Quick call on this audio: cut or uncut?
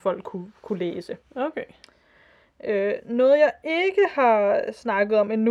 uncut